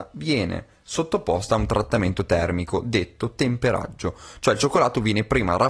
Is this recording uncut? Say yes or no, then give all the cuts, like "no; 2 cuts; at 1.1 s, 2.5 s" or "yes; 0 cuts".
yes; 0 cuts